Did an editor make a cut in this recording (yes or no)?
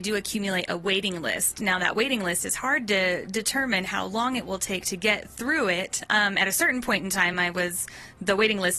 no